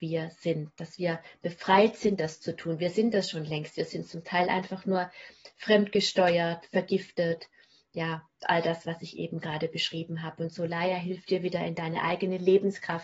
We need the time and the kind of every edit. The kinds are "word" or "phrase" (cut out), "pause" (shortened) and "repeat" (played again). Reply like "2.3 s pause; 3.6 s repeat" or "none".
none